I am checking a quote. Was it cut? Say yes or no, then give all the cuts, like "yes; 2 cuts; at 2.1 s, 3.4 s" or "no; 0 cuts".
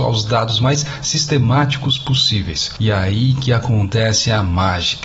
no; 0 cuts